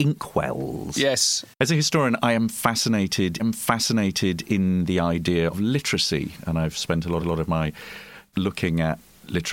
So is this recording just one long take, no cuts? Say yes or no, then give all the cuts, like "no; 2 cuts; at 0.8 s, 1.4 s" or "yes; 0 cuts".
no; 5 cuts; at 1.5 s, 3.4 s, 5.5 s, 7.2 s, 8.3 s